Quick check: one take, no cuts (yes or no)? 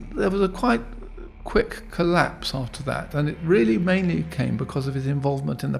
yes